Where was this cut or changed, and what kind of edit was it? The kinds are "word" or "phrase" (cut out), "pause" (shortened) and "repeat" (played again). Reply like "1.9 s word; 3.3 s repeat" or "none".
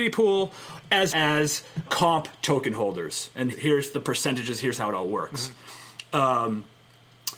1.1 s word; 1.9 s word; 3.5 s word

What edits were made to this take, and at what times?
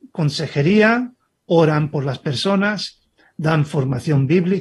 none

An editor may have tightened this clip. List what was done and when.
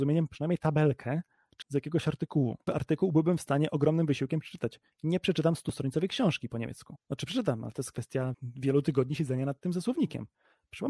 1.6 s word; 2.7 s word; 8.3 s word

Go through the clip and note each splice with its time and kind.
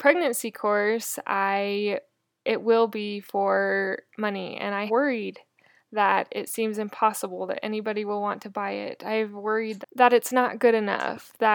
4.9 s word; 9.8 s word

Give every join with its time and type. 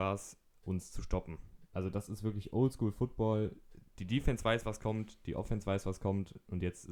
none

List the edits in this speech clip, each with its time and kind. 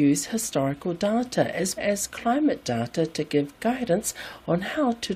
1.8 s word

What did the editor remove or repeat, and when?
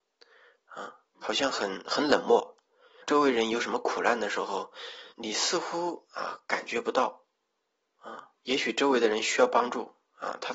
1.1 s pause; 3.0 s word; 5.1 s pause; 8.4 s pause

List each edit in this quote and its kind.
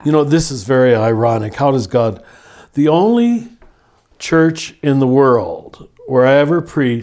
none

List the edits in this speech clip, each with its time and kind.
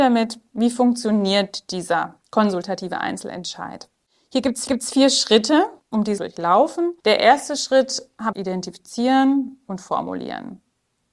2.2 s pause; 4.7 s repeat; 5.8 s pause; 6.2 s phrase; 7.0 s pause; 8.3 s phrase

